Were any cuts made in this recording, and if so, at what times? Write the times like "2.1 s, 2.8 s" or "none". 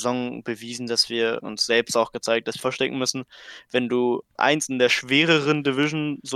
1.4 s, 2.6 s, 4.4 s